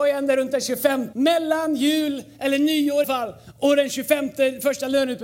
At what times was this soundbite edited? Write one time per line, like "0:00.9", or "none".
0:01.1
0:03.0